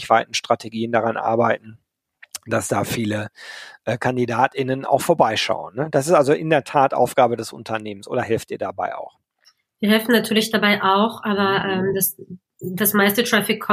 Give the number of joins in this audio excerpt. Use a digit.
0